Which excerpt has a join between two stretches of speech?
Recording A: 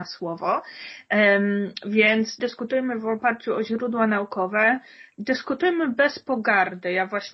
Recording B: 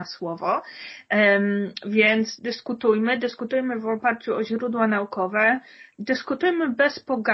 A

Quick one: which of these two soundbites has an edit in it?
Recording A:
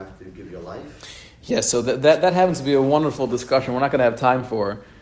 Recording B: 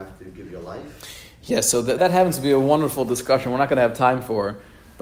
B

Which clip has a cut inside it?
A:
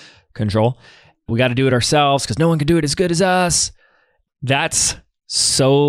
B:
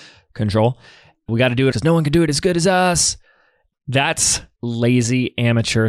B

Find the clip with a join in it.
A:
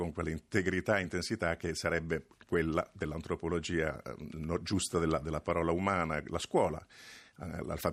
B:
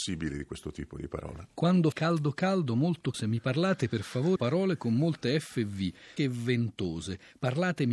B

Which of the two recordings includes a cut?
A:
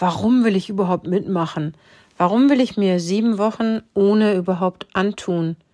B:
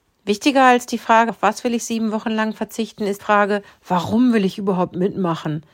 B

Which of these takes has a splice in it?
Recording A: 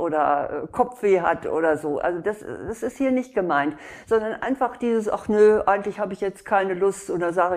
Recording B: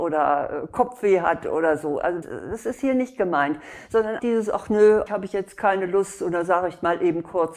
B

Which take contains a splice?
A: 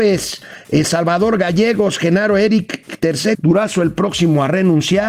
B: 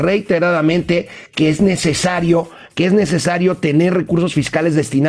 A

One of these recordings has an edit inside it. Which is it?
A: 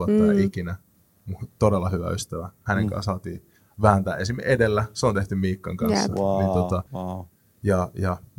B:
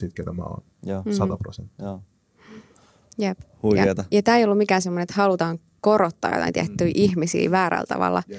A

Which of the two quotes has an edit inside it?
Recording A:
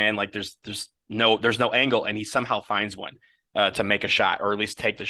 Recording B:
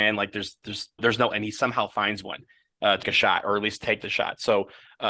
B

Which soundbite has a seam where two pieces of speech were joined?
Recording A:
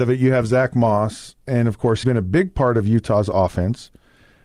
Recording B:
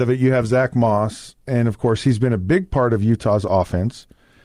A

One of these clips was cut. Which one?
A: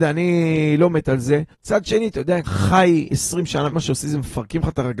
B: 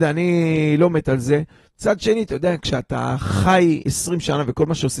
A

